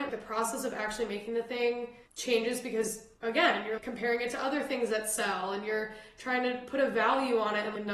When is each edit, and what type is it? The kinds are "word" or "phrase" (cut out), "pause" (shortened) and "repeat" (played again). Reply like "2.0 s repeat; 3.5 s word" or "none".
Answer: 2.0 s pause; 3.1 s pause